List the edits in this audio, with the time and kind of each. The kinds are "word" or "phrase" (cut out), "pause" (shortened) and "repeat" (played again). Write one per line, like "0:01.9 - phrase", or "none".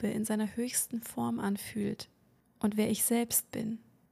none